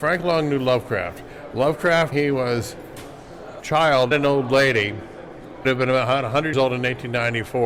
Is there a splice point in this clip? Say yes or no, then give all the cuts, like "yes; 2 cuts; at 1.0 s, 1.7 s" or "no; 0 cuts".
yes; 5 cuts; at 2.1 s, 3.6 s, 4.1 s, 5.6 s, 6.5 s